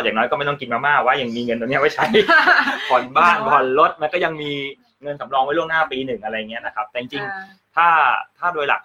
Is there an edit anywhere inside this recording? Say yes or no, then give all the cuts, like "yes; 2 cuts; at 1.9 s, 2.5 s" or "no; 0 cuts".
no; 0 cuts